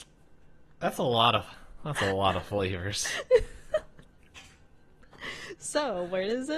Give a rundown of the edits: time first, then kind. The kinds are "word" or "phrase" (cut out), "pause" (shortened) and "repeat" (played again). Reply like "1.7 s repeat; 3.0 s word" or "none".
none